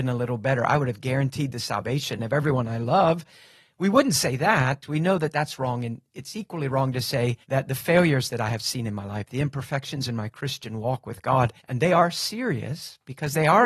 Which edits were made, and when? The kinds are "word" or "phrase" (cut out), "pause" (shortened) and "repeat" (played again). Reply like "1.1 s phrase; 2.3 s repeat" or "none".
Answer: 7.4 s pause; 11.6 s pause